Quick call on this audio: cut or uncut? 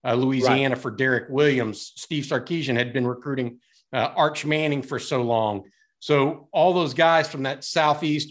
uncut